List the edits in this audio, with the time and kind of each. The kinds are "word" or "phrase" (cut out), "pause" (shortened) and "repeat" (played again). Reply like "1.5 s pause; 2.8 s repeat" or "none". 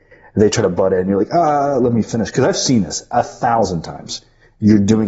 none